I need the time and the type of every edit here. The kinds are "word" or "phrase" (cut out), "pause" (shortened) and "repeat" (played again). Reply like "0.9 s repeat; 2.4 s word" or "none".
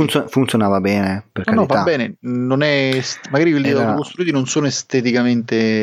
none